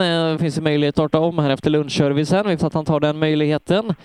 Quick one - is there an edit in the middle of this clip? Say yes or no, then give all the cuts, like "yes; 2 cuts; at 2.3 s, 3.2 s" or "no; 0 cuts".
yes; 2 cuts; at 0.9 s, 2.6 s